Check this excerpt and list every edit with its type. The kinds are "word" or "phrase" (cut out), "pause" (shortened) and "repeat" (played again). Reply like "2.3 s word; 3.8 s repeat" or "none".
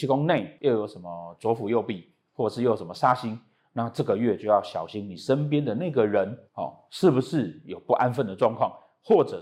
6.5 s pause